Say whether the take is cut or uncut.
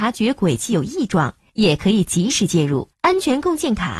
cut